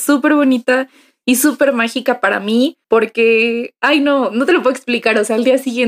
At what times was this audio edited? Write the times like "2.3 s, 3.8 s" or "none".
2.8 s